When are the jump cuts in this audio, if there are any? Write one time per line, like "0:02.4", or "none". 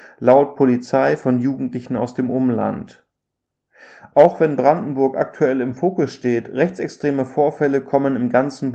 none